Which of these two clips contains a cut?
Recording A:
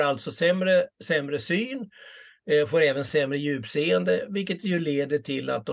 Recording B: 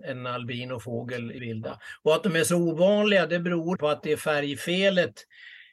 B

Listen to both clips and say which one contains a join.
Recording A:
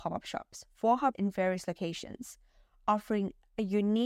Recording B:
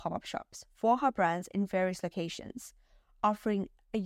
A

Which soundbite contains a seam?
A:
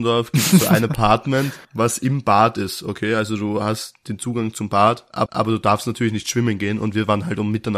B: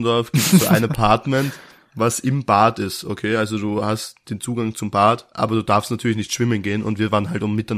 A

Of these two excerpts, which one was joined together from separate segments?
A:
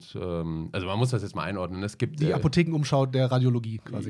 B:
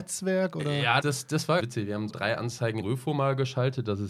B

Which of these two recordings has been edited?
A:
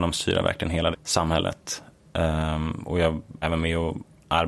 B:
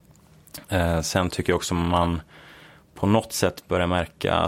A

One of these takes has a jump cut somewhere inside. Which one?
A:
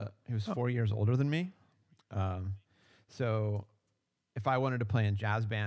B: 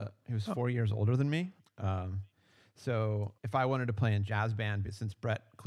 B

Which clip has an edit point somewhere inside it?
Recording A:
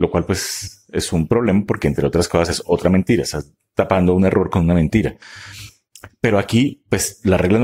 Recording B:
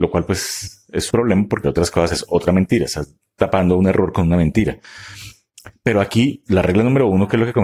B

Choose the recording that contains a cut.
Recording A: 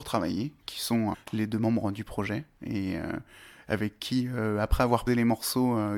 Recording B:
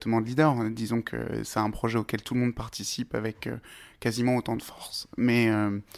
A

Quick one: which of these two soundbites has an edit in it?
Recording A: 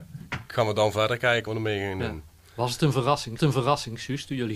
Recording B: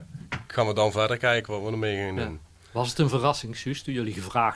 A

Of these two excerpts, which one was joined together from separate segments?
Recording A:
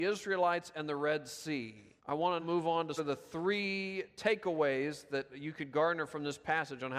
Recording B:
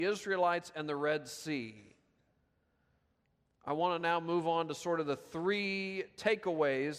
A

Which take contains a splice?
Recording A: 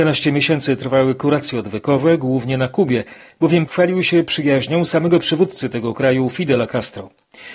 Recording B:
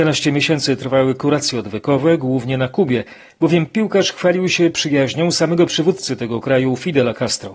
A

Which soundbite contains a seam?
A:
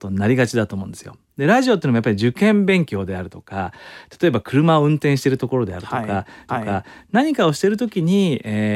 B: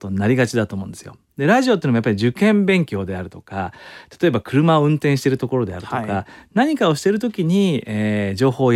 A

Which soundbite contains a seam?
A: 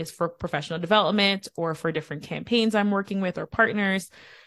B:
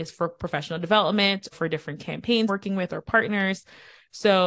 B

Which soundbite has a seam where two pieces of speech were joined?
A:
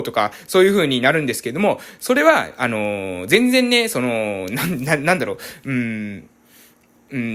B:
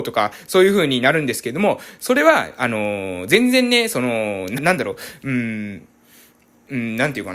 B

